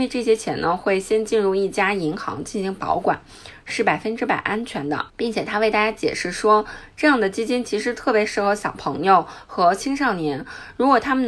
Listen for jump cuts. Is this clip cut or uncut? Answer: cut